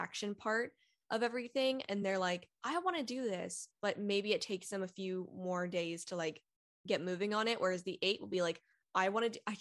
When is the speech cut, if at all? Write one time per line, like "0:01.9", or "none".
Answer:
none